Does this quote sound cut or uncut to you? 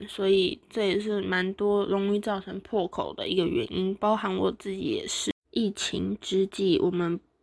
uncut